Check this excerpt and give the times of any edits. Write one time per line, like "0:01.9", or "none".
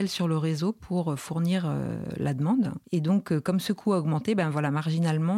none